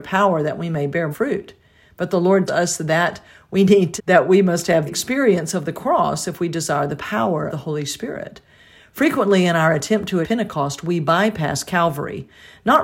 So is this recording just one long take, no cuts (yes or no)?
no